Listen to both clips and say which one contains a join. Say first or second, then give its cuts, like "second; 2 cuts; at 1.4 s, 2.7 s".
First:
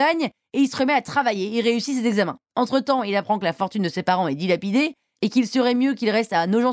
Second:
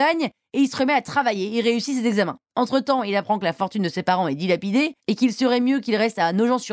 second; 1 cut; at 5.0 s